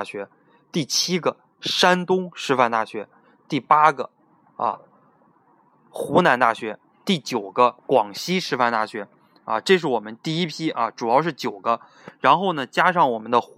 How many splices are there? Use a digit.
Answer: 1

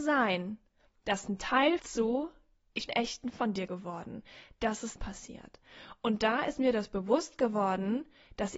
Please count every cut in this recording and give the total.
4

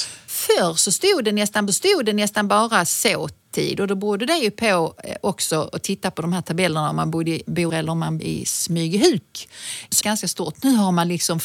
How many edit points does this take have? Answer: 4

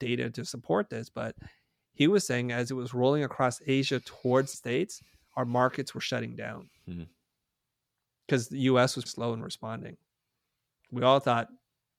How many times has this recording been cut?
2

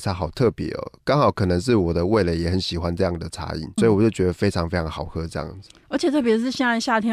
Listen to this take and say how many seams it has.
1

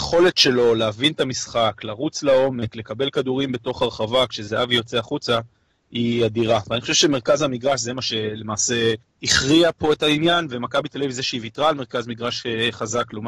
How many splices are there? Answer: 0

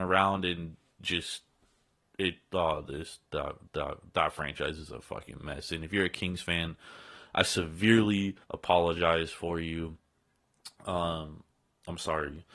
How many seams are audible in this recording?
3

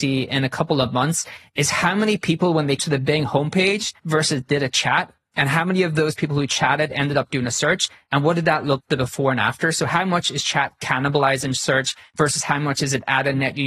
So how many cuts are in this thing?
3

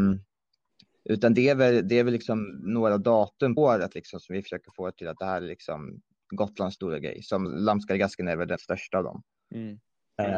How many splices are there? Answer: 3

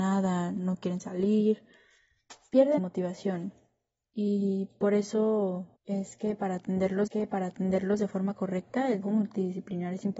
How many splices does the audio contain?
4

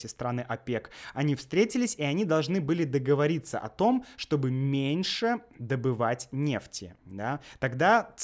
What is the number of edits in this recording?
1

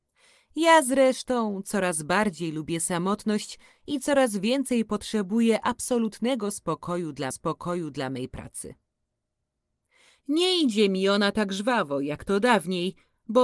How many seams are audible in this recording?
1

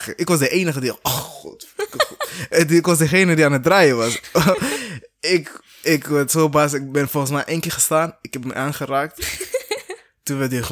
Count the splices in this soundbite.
0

